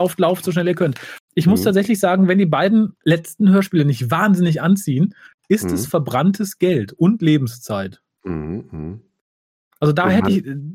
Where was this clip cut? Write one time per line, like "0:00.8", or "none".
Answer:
none